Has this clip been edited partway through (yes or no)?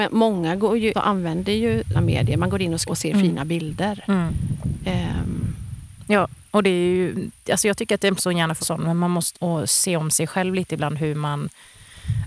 yes